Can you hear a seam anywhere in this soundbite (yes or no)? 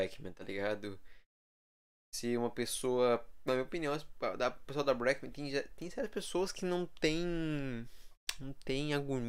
no